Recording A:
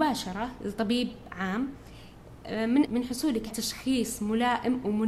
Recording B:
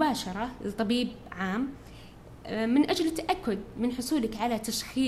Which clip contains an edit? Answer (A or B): A